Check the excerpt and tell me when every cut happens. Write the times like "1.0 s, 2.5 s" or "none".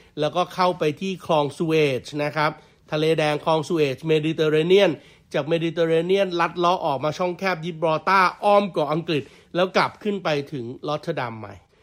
none